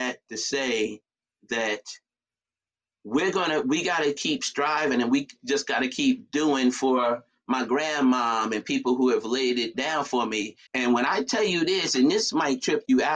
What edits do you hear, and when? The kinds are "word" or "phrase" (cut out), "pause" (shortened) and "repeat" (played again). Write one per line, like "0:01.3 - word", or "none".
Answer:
0:10.7 - pause

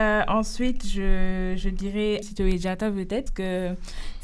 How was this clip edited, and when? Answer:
0:02.2 - word
0:03.3 - word

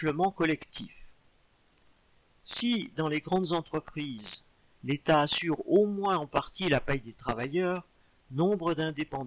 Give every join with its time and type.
none

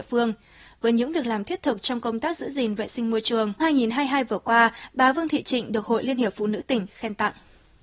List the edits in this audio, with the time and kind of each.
0:03.6 - word

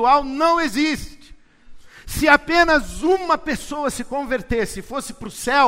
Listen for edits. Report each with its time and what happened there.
none

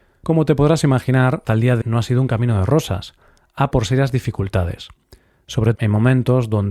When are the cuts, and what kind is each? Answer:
0:01.4 - word
0:01.8 - word
0:03.7 - word
0:05.7 - word

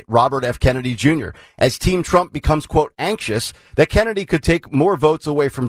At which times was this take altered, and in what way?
none

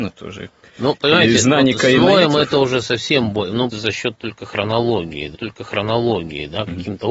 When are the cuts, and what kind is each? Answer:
0:03.7 - word
0:05.3 - repeat

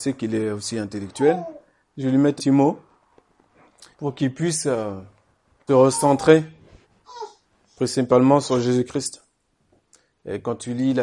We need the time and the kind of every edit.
0:02.4 - word
0:03.9 - pause
0:05.7 - word

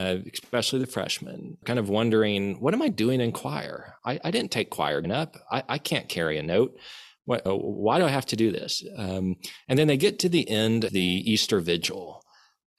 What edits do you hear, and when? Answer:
0:01.6 - word
0:05.0 - word
0:07.5 - word
0:10.9 - word

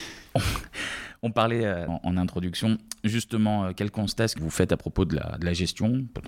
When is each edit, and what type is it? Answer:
0:01.9 - word
0:04.4 - word

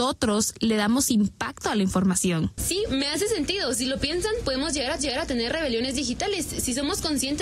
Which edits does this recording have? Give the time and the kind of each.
0:05.0 - repeat

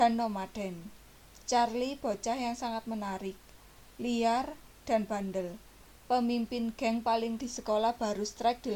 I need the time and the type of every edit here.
0:07.4 - word

